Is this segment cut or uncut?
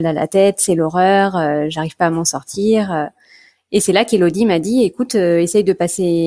uncut